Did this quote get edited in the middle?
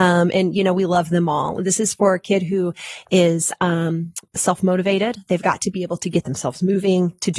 yes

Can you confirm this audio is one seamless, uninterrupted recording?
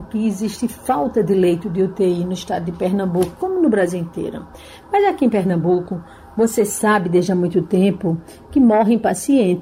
yes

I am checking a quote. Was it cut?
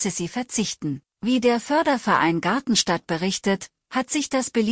yes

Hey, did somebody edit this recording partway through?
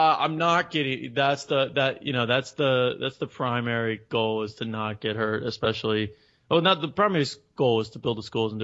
no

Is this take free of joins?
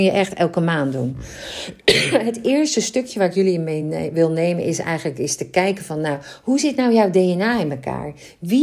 yes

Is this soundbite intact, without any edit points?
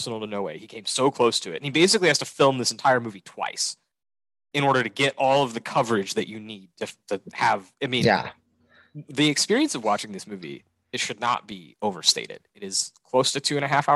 yes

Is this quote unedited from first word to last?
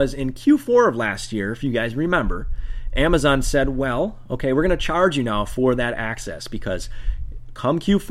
yes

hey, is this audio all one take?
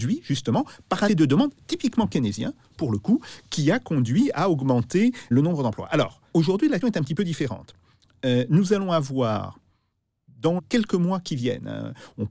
no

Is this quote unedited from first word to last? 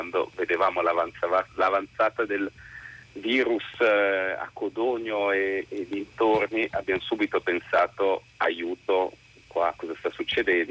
no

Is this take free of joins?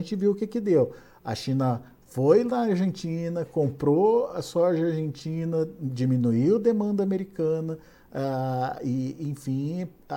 yes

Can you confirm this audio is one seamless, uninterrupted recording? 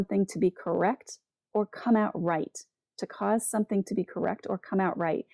yes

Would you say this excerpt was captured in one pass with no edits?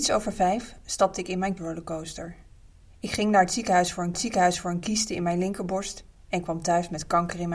no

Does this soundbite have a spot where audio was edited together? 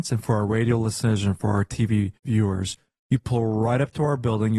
yes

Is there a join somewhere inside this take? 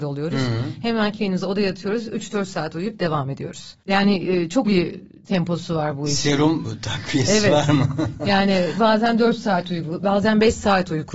yes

